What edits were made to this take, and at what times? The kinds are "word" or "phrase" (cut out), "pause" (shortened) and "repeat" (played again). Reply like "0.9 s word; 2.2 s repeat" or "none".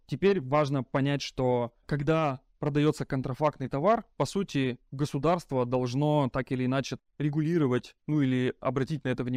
8.0 s pause